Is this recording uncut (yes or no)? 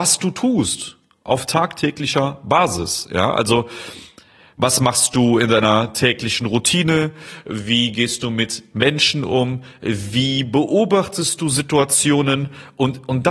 yes